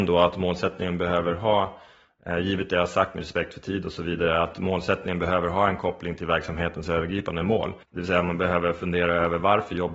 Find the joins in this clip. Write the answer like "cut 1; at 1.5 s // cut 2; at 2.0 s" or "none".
cut 1; at 7.8 s